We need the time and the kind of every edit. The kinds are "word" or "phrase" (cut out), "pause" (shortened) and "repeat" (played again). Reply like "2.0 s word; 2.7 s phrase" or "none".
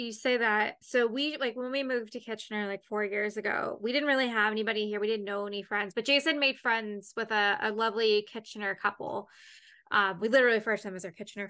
none